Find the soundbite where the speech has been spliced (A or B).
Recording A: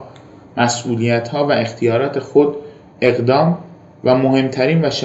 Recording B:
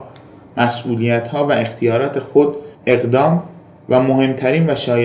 B